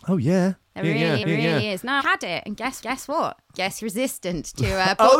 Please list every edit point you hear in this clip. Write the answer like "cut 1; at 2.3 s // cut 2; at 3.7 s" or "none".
cut 1; at 1.2 s // cut 2; at 2.0 s // cut 3; at 2.8 s // cut 4; at 3.8 s